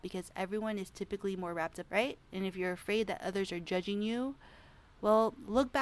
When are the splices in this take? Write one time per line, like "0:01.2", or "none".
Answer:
0:01.9
0:02.2